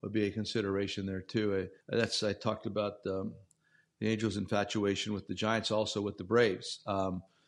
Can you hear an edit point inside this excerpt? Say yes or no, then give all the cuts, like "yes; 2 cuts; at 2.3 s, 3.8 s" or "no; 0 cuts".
yes; 1 cut; at 1.8 s